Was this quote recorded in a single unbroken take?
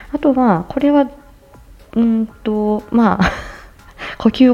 yes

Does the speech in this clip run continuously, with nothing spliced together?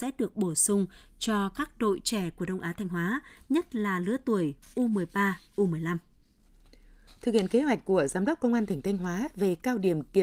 yes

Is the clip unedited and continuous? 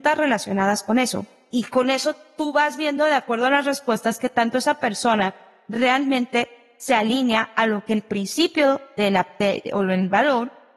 yes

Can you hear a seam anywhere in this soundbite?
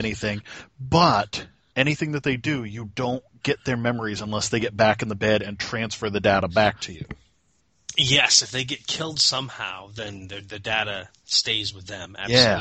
no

